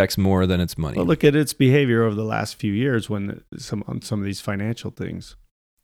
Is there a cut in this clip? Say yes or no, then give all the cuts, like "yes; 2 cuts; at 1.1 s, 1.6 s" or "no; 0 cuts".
no; 0 cuts